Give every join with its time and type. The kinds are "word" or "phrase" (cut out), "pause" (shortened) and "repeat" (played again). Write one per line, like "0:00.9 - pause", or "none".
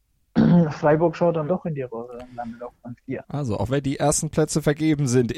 0:01.5 - word
0:03.2 - pause